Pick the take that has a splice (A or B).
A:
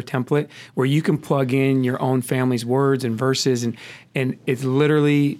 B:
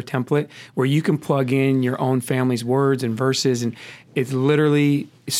B